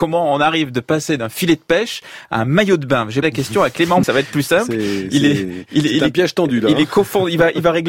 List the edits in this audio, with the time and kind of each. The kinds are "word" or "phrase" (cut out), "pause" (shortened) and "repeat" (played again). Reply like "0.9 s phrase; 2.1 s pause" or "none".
3.2 s word; 4.0 s word